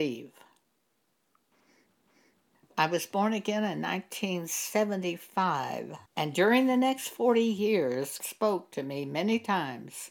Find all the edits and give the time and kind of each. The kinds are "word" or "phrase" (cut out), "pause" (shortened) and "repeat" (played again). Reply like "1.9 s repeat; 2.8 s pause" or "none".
6.1 s pause; 8.2 s word